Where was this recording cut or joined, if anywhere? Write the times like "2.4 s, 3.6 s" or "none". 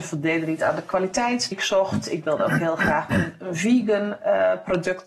1.5 s

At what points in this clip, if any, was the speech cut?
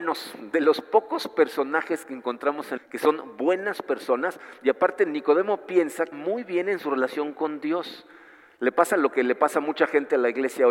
2.8 s, 6.1 s

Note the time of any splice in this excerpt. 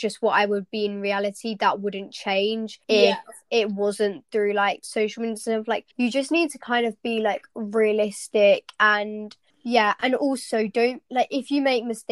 2.8 s, 5.9 s, 9.5 s

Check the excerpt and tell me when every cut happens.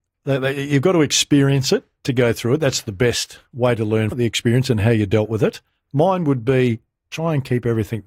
4.1 s

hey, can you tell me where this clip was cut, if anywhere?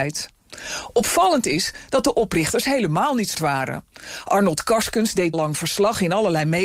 3.3 s, 5.3 s

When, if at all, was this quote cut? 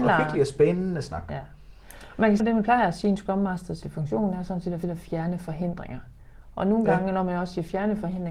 2.4 s, 3.8 s, 4.8 s

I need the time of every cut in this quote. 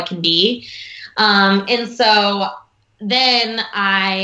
none

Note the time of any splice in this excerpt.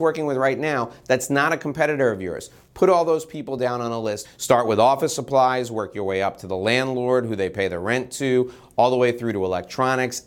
none

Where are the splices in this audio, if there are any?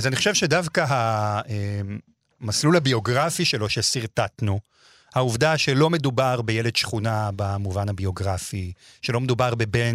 none

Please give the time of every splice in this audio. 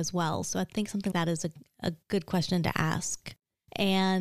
1.1 s, 2.0 s

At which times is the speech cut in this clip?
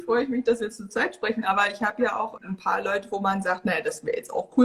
2.4 s

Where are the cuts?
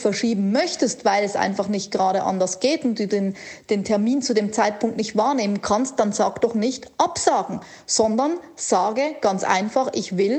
none

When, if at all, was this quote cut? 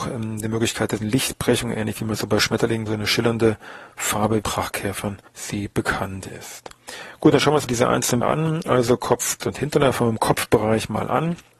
1.0 s, 2.9 s, 4.4 s, 5.3 s, 7.7 s, 8.2 s, 9.4 s

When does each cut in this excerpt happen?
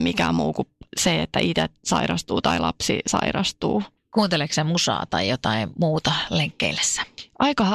4.0 s

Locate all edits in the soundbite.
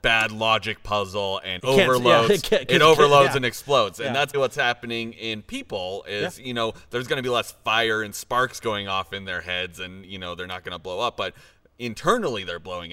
1.6 s, 4.3 s

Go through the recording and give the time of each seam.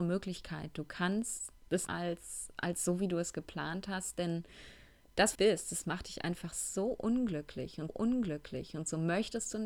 1.9 s, 5.3 s, 7.9 s

